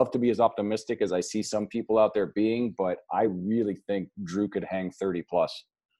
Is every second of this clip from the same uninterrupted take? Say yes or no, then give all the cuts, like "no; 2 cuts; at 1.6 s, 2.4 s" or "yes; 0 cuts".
yes; 0 cuts